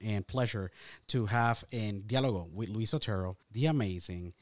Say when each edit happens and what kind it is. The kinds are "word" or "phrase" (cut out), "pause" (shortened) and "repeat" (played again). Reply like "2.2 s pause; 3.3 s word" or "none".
3.4 s pause